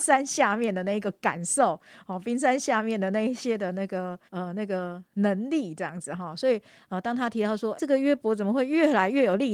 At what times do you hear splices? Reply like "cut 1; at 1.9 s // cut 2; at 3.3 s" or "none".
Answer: cut 1; at 4.3 s // cut 2; at 7.8 s